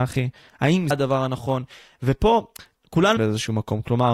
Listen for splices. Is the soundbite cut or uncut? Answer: cut